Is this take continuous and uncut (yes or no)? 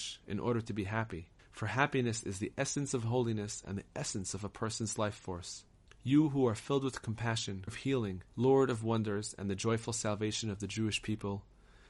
no